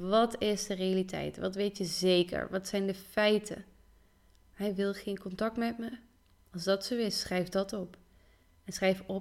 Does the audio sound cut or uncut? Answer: uncut